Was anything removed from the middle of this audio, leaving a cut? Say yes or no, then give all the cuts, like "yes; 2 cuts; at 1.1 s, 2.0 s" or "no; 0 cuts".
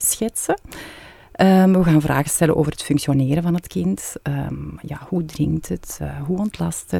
no; 0 cuts